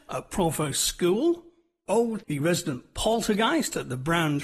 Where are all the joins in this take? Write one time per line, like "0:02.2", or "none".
0:02.2